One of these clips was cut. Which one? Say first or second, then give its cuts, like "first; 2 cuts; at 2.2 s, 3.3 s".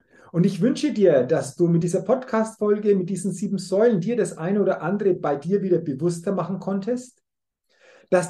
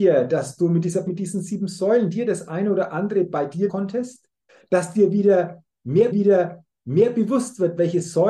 second; 4 cuts; at 1.1 s, 3.7 s, 4.5 s, 6.1 s